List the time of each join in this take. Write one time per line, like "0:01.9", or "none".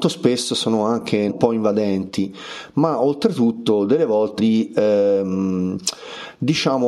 0:01.3
0:04.4